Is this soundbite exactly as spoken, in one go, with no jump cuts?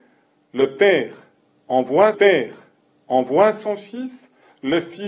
no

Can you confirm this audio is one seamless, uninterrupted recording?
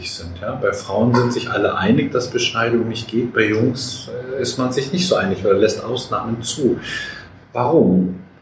yes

